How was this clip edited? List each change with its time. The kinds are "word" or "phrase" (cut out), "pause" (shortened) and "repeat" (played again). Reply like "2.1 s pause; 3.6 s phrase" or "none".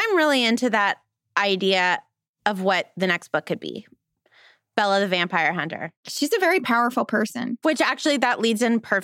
none

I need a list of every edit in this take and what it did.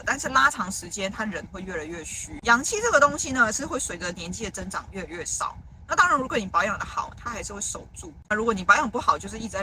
8.2 s pause

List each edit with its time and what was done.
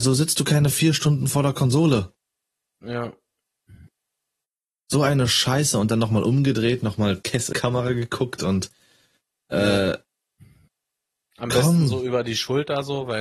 7.5 s word

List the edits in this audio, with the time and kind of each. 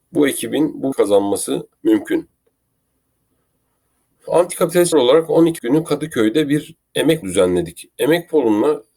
0.9 s word; 1.8 s pause; 4.9 s word; 5.6 s word; 7.2 s word

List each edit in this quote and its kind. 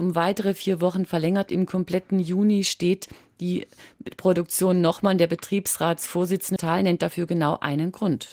6.6 s word

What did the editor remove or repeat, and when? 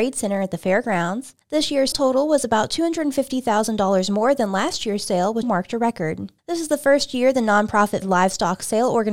1.4 s pause; 1.9 s word; 5.4 s word; 6.4 s pause; 8.0 s word

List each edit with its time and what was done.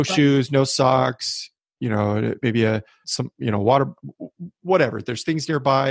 3.0 s word

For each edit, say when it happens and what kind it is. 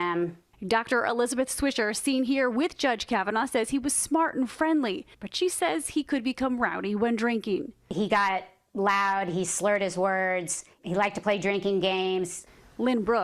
5.1 s pause; 10.7 s pause

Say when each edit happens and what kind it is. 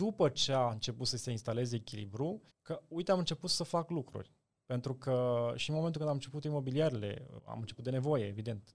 2.5 s pause; 7.4 s word

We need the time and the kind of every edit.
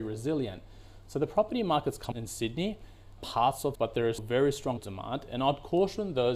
2.1 s word; 3.2 s word; 3.7 s word; 4.2 s word; 4.8 s word

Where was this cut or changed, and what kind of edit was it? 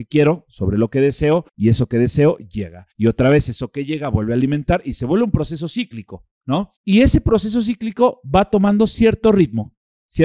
1.5 s pause; 2.9 s pause; 6.8 s pause

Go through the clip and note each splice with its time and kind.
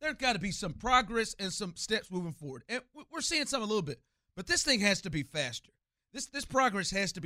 none

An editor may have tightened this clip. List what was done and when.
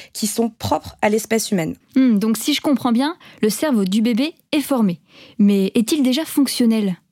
1.8 s pause

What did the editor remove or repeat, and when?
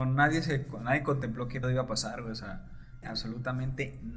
1.6 s word; 3.0 s word

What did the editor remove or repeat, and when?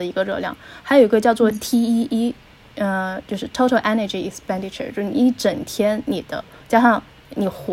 none

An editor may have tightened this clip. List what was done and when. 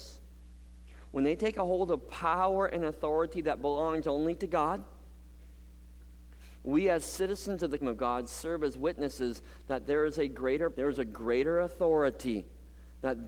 7.8 s word; 10.7 s word

